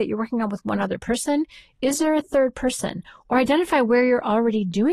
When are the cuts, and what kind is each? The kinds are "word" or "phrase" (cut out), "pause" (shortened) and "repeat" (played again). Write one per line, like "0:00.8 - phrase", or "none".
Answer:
none